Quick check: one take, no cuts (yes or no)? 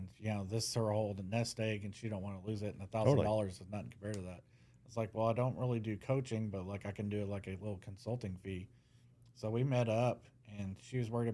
yes